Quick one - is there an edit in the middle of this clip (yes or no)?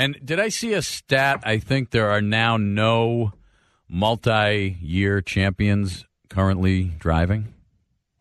no